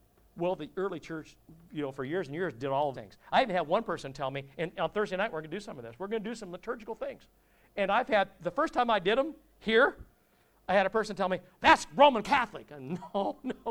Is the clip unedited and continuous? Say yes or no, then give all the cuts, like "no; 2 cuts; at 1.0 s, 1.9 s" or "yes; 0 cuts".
no; 1 cut; at 2.9 s